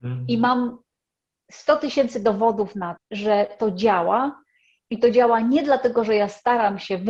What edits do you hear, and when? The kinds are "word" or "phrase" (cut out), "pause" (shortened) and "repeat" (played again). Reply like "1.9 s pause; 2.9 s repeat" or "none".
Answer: 3.0 s word